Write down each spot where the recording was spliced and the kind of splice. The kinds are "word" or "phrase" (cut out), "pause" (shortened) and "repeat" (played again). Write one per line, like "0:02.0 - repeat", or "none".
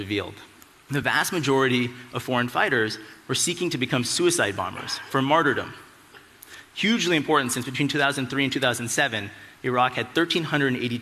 none